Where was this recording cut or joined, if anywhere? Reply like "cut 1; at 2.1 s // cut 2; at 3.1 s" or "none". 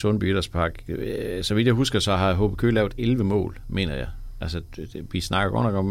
none